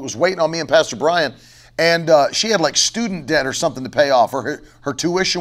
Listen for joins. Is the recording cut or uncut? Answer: uncut